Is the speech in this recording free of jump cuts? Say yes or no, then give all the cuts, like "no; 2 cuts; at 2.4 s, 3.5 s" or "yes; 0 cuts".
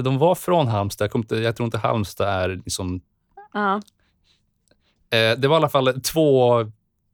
yes; 0 cuts